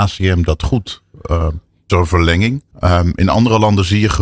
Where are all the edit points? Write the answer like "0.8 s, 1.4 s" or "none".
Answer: 1.9 s, 2.7 s